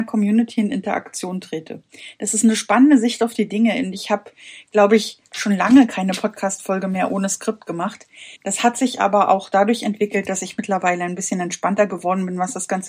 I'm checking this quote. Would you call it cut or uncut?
cut